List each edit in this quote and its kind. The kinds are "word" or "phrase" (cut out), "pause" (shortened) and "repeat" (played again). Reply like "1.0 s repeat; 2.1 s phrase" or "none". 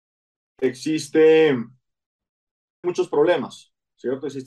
2.8 s word